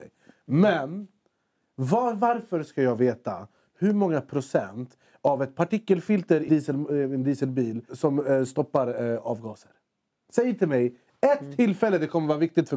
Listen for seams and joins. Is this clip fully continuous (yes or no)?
no